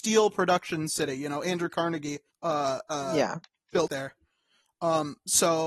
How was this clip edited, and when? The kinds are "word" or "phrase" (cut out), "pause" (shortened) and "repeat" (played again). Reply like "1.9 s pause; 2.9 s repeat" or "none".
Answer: 2.3 s pause; 3.9 s phrase